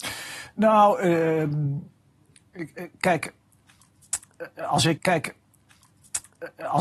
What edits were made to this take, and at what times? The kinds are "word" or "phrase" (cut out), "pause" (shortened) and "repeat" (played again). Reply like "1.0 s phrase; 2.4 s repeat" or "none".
5.0 s repeat